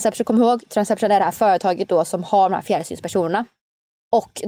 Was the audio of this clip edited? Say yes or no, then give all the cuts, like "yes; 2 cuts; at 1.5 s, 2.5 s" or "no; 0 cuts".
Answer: no; 0 cuts